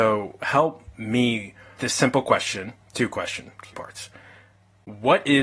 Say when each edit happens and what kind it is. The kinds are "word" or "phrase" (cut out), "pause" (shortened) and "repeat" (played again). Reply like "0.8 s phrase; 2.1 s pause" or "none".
1.8 s word; 2.8 s pause; 3.7 s word

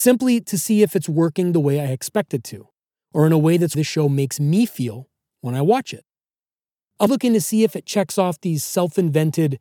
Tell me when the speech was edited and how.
3.7 s phrase; 7.1 s word

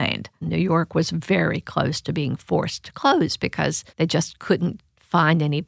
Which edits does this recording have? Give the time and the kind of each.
3.9 s pause

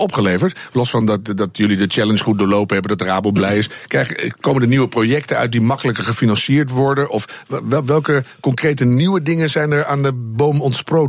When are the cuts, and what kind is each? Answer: none

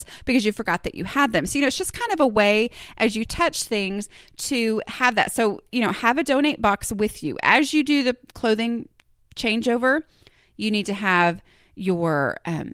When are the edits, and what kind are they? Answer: none

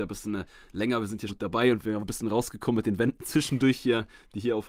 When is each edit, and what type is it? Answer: 1.3 s word; 2.0 s phrase

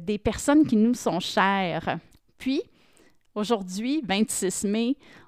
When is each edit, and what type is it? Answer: 2.1 s pause

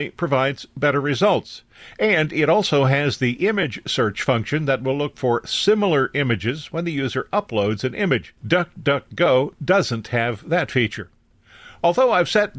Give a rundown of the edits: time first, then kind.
8.4 s pause

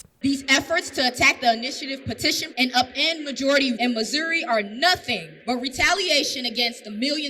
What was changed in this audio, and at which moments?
2.5 s word; 3.8 s word; 5.4 s pause

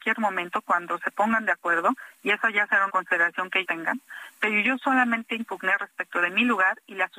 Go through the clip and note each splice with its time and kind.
2.9 s word; 3.6 s word

